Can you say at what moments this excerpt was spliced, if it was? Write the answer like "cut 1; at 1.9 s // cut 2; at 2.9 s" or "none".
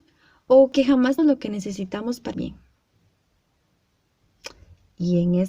cut 1; at 1.2 s // cut 2; at 2.3 s